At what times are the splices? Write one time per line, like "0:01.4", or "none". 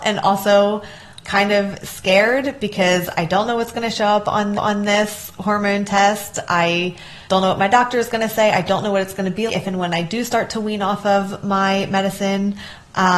0:01.2
0:04.5
0:07.2
0:09.5